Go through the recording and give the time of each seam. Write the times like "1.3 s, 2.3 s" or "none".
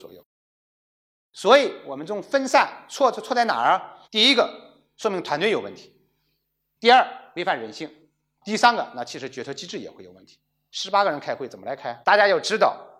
4.0 s, 12.0 s